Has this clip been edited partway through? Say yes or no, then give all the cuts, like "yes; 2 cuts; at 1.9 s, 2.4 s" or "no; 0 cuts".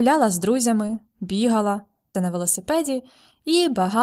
yes; 1 cut; at 2.1 s